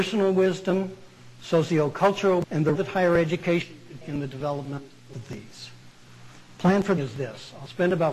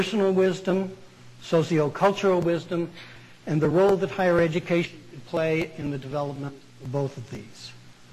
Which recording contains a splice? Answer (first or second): first